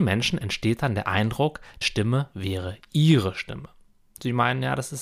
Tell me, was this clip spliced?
yes; 1 cut; at 1.8 s

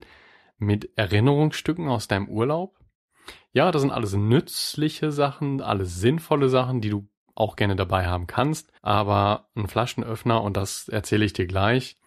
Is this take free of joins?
no; 1 cut; at 8.8 s

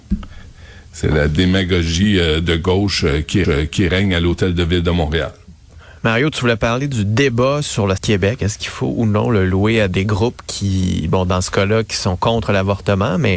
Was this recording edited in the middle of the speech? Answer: yes; 2 cuts; at 3.4 s, 8.0 s

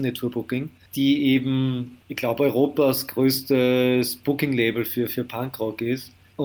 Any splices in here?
no; 0 cuts

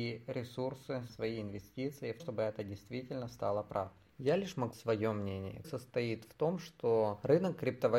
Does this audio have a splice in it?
yes; 5 cuts; at 1.1 s, 2.2 s, 4.1 s, 4.7 s, 5.6 s

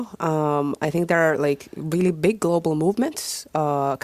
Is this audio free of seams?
yes; 0 cuts

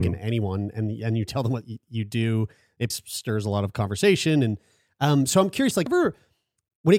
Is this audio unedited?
no; 2 cuts; at 2.9 s, 5.9 s

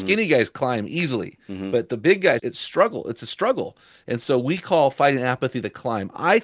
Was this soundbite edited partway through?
yes; 1 cut; at 2.4 s

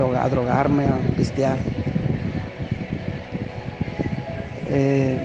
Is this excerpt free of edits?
no; 1 cut; at 1.1 s

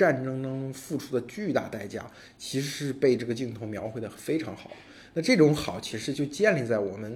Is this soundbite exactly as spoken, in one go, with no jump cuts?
yes; 0 cuts

